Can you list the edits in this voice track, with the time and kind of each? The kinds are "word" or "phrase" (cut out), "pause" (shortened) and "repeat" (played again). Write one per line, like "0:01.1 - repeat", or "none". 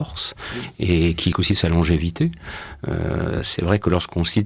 0:01.3 - word